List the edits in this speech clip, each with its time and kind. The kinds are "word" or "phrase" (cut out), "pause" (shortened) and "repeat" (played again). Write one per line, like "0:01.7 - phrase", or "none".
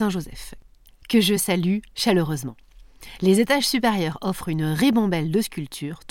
none